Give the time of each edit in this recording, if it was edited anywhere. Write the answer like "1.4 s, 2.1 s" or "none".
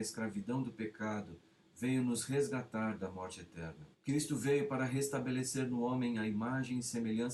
3.9 s